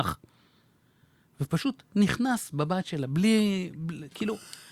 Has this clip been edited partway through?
no; 0 cuts

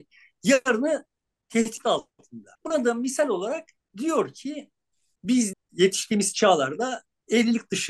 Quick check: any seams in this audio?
yes; 2 cuts; at 2.5 s, 5.5 s

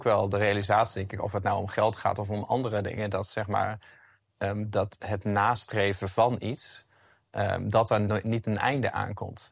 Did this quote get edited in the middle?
no; 0 cuts

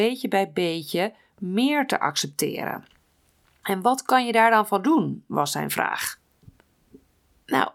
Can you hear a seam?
no; 0 cuts

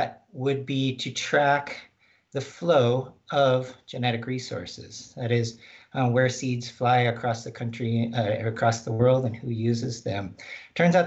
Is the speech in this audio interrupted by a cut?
no; 0 cuts

